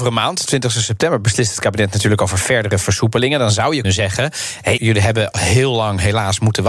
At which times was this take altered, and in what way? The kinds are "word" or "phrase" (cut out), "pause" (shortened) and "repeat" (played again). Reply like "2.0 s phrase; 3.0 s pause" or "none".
3.8 s word; 4.8 s word; 5.3 s word